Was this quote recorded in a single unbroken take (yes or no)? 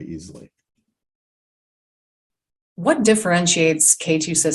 yes